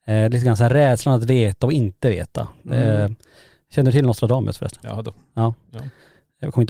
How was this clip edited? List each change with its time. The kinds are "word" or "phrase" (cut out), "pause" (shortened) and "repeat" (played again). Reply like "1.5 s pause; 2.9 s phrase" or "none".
none